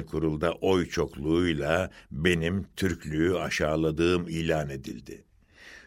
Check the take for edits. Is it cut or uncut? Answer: uncut